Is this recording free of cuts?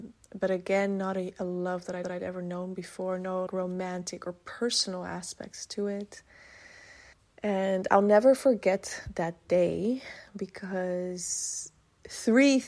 no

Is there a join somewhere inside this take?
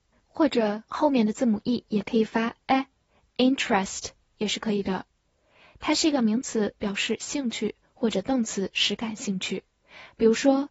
no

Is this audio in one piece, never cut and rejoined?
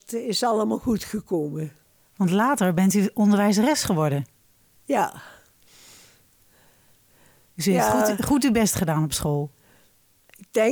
yes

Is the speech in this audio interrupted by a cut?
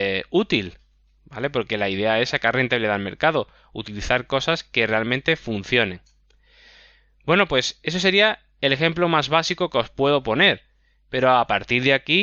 no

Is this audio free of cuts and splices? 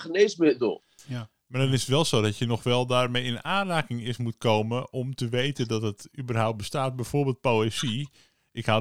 yes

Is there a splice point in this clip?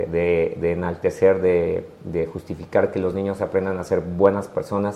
no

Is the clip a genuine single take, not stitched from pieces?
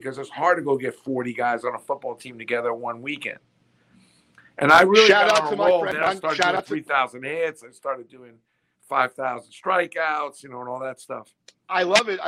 yes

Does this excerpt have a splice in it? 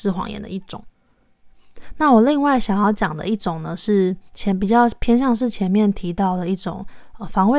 yes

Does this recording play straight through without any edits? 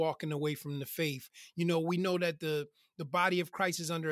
yes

